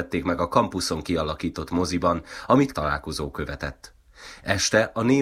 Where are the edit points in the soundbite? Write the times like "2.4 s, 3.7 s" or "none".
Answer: 2.7 s

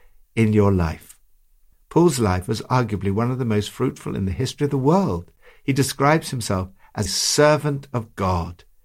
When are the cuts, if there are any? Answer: 7.1 s

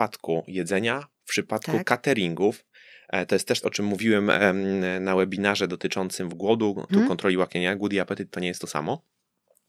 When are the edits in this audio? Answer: 1.1 s, 3.6 s, 6.3 s, 6.9 s

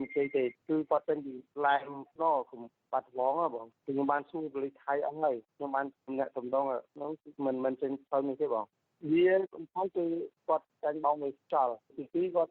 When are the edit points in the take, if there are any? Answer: 7.3 s

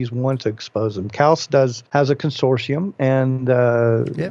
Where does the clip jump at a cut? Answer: 1.9 s

